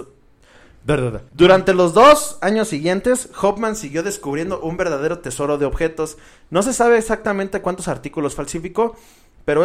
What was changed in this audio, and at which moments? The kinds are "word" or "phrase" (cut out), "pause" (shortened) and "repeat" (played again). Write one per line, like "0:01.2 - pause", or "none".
0:01.3 - pause